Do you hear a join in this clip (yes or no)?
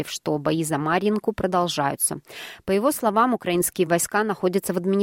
no